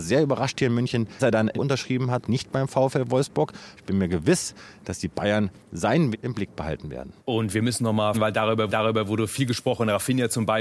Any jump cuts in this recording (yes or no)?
yes